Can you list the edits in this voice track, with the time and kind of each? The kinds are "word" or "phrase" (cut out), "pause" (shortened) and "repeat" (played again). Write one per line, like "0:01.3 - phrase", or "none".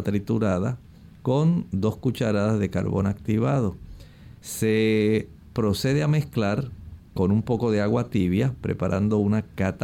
0:04.4 - pause